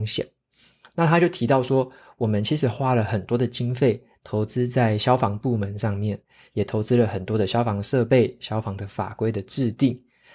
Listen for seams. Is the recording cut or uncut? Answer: uncut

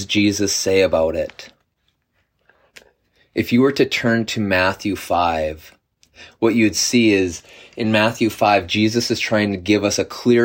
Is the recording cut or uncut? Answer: uncut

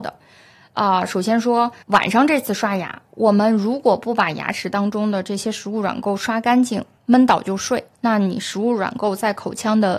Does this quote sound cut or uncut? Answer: cut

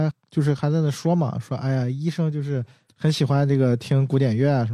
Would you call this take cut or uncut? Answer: uncut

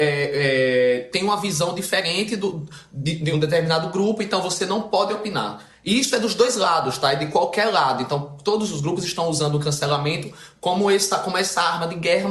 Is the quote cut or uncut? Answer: cut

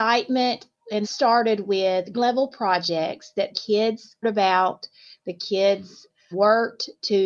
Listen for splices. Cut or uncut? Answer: cut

